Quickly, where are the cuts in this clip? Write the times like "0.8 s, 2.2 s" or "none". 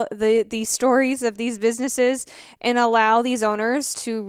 none